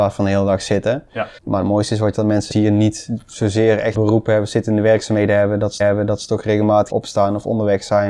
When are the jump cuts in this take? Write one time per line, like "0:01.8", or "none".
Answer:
0:01.4
0:02.1
0:02.5
0:03.9
0:05.8
0:06.9